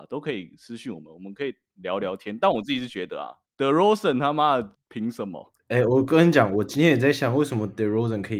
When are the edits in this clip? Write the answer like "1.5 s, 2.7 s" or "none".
none